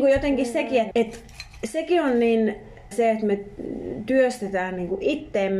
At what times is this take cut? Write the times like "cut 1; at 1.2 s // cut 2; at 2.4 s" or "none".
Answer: cut 1; at 0.9 s // cut 2; at 2.9 s